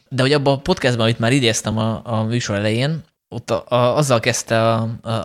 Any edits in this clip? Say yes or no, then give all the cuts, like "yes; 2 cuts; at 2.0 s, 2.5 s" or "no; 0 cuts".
no; 0 cuts